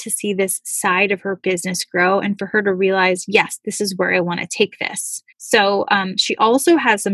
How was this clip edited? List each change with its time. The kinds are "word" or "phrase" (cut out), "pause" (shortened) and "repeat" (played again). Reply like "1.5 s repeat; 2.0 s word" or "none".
5.3 s pause